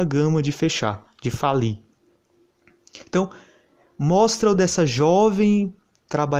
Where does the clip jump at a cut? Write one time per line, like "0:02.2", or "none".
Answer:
0:04.5

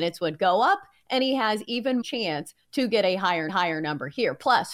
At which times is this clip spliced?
0:02.0
0:03.5

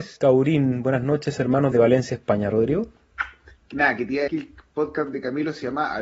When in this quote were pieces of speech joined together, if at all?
0:01.7
0:04.3

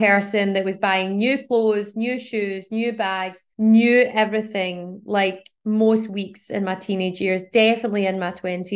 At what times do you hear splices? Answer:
0:03.5

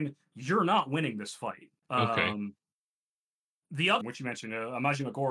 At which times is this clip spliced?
0:01.8
0:04.0

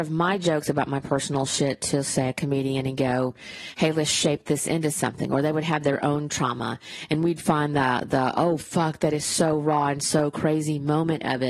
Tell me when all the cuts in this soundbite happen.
none

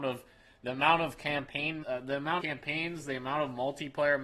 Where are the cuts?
0:01.8
0:02.4

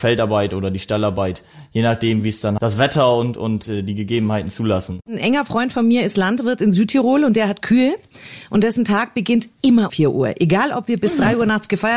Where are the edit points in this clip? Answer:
0:02.6
0:09.9

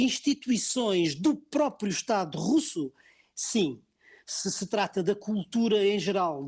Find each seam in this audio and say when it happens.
none

